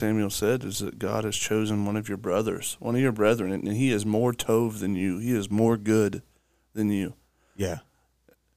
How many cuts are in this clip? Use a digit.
0